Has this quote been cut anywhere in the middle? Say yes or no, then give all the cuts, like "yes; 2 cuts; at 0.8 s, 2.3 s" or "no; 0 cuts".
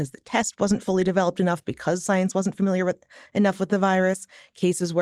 no; 0 cuts